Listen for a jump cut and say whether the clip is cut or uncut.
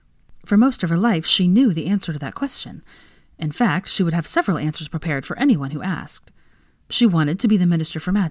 uncut